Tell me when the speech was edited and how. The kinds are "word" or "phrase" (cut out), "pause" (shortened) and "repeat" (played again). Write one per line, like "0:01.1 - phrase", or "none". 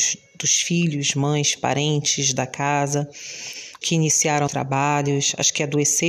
0:01.6 - word
0:03.8 - word
0:04.5 - word